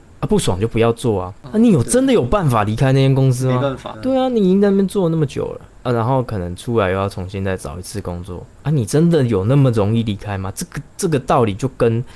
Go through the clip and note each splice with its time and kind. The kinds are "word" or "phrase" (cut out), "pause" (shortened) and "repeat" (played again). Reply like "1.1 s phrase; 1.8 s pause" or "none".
3.9 s word; 8.5 s pause